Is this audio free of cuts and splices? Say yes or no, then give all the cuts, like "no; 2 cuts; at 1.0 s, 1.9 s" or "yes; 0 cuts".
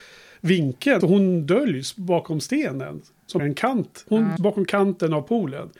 no; 3 cuts; at 1.0 s, 3.4 s, 4.4 s